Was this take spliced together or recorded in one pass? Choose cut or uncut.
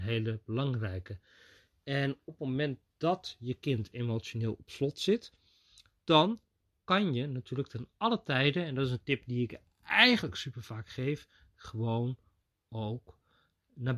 uncut